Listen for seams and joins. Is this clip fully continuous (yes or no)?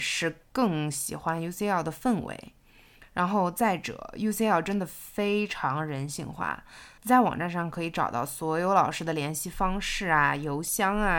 no